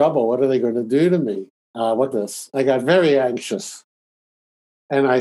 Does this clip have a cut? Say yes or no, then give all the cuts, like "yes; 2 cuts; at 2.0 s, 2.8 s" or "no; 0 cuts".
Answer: yes; 2 cuts; at 1.5 s, 2.1 s